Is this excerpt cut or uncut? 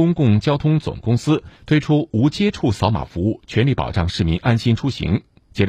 cut